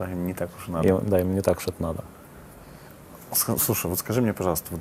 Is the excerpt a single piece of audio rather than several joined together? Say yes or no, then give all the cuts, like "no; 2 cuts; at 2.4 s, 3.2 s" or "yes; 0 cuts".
yes; 0 cuts